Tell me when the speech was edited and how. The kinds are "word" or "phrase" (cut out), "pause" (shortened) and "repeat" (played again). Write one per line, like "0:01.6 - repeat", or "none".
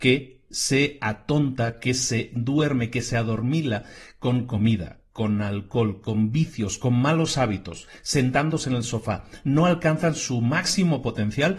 none